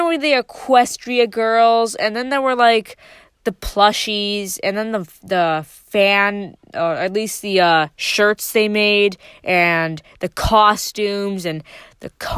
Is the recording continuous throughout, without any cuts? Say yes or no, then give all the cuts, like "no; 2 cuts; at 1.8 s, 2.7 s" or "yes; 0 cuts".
yes; 0 cuts